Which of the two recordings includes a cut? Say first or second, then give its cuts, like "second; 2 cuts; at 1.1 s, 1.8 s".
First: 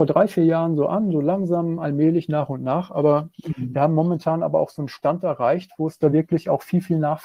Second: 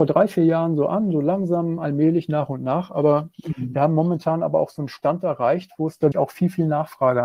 second; 1 cut; at 6.1 s